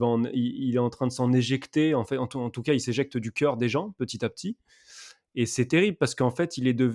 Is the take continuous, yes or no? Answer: yes